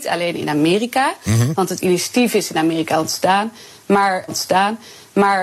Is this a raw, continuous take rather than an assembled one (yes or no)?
no